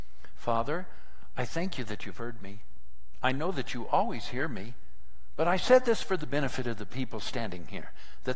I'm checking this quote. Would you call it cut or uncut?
uncut